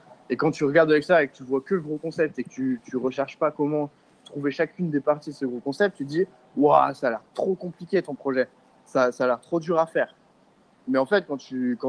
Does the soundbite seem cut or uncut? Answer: uncut